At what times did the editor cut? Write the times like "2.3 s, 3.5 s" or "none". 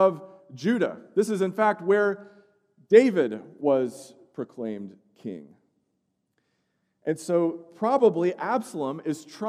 none